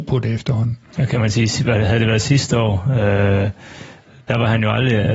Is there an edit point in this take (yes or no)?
no